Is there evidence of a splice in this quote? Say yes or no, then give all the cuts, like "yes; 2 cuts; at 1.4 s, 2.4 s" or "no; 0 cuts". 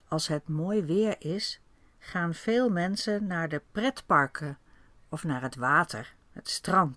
no; 0 cuts